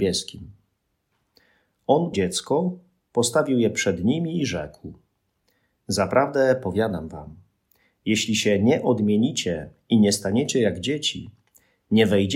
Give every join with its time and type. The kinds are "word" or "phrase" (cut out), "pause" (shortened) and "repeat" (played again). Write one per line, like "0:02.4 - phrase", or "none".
0:02.1 - word